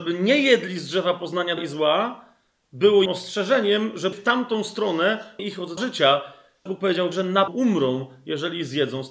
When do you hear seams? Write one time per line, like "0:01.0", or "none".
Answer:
0:01.6
0:03.1
0:04.1
0:05.4
0:05.8
0:06.7
0:07.1
0:07.5